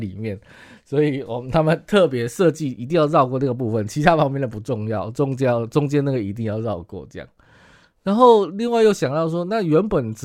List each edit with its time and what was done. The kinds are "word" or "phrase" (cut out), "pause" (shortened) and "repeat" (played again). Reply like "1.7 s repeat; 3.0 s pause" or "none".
none